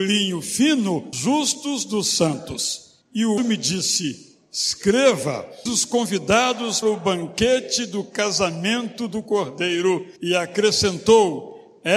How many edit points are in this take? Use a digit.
6